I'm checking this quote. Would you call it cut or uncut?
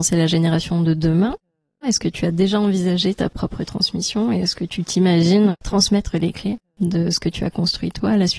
uncut